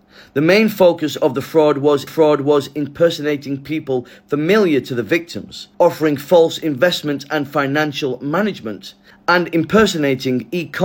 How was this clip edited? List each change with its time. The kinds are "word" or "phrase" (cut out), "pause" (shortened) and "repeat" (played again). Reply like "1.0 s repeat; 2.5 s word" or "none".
2.1 s repeat; 5.7 s pause